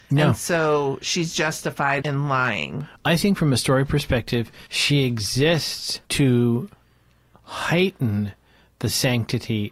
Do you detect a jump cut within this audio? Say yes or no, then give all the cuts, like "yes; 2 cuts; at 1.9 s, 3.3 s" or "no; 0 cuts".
yes; 3 cuts; at 2.0 s, 4.7 s, 6.0 s